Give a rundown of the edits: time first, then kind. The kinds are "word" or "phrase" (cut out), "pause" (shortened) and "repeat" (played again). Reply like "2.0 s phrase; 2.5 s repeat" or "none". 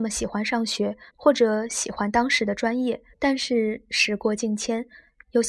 1.1 s pause; 3.1 s pause